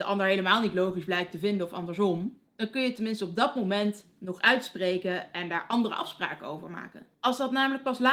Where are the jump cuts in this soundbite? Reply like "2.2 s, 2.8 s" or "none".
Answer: 2.5 s, 7.1 s